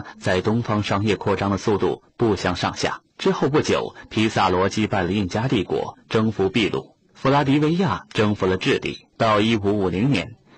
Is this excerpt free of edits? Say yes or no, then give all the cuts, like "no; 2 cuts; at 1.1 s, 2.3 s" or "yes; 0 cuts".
no; 2 cuts; at 3.1 s, 9.1 s